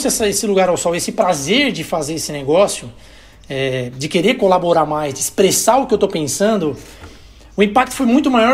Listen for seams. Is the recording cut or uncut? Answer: uncut